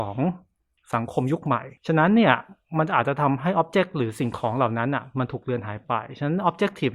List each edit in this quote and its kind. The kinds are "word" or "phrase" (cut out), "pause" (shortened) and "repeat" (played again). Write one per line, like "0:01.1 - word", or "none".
0:01.8 - pause